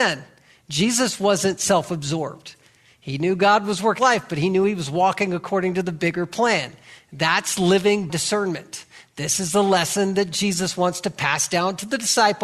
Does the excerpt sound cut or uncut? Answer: cut